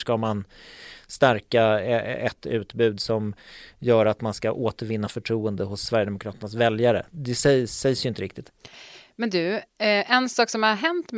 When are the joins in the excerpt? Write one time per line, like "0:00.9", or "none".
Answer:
none